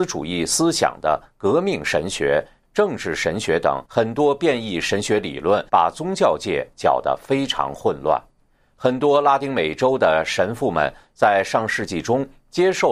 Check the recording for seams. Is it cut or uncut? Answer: cut